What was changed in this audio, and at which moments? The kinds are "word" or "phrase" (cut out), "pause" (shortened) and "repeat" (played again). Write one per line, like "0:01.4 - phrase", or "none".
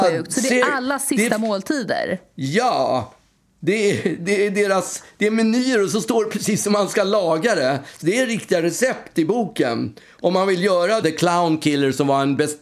0:08.0 - phrase
0:11.0 - phrase